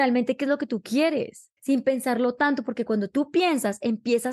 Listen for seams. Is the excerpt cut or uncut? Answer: cut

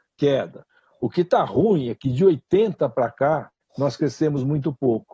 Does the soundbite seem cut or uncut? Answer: cut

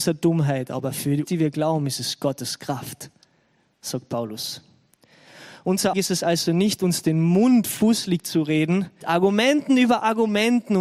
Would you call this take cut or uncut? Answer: cut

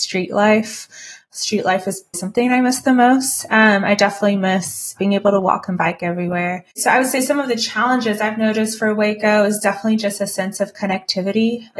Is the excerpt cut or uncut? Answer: cut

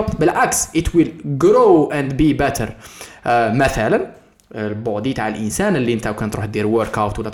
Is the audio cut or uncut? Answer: uncut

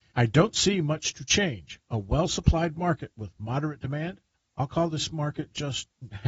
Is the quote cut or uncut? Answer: uncut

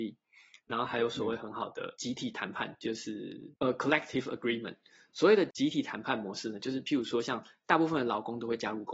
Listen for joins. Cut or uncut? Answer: uncut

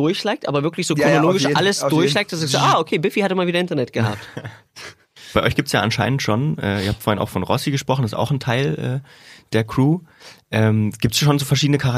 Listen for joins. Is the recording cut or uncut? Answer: uncut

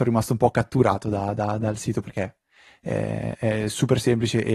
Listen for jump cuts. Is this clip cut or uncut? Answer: uncut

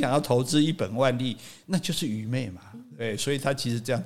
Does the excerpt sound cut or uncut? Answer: uncut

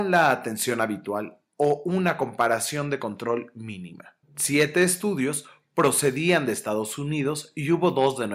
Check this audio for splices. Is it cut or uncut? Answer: cut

